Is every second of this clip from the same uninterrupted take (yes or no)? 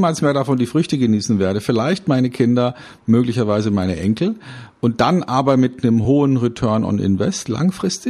yes